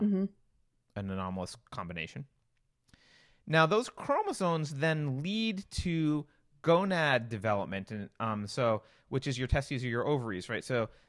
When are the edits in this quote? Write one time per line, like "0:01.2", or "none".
none